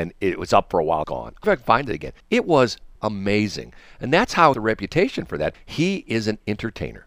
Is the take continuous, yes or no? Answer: no